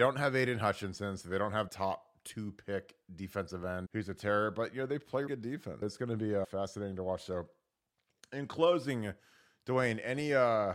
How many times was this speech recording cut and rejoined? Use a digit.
5